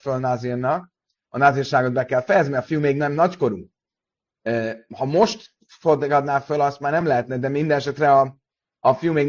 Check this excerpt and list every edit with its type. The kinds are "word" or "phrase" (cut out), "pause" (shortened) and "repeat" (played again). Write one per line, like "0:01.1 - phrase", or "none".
none

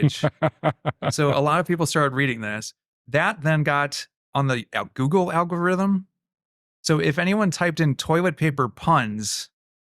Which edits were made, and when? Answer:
none

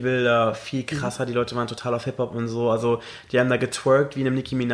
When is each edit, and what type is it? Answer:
none

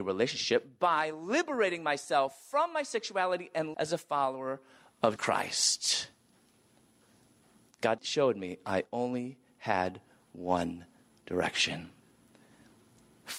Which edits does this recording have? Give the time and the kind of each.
0:03.7 - word
0:05.2 - word
0:08.0 - word

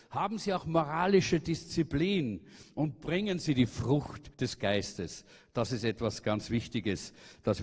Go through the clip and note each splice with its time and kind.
0:04.3 - pause
0:06.2 - word

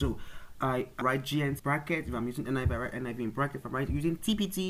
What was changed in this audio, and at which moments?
0:01.0 - word
0:01.6 - word

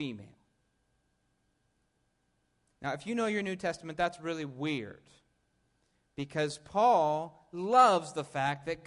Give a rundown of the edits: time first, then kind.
none

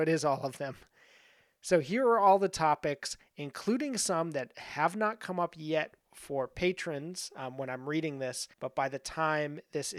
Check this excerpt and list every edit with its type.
0:08.5 - pause

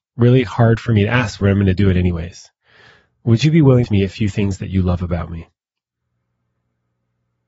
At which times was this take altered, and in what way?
0:01.4 - word
0:03.8 - phrase

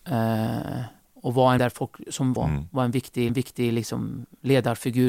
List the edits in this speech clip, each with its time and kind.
0:01.0 - pause
0:01.6 - word
0:02.4 - phrase
0:03.3 - repeat

